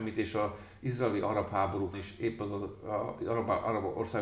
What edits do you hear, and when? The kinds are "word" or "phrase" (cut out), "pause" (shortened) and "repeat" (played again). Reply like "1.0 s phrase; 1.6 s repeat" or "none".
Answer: 1.9 s word